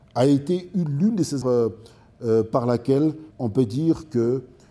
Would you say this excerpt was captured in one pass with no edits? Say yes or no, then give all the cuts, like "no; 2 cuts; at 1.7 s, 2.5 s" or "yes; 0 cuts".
no; 2 cuts; at 1.4 s, 3.3 s